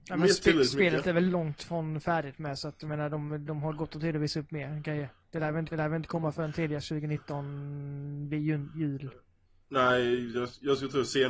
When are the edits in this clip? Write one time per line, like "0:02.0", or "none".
0:01.3
0:05.7
0:09.5